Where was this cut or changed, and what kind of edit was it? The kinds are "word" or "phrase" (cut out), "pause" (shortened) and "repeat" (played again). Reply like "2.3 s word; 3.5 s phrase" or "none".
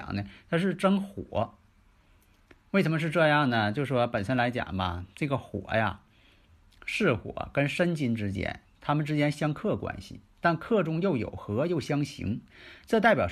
none